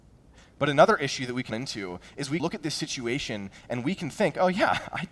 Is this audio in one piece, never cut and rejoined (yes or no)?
no